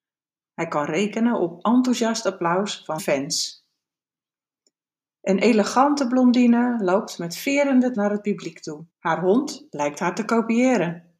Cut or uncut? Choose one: cut